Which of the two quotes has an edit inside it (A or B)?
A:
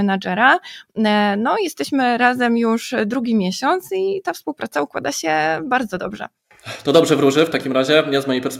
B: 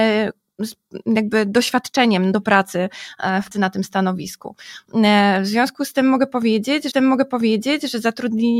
B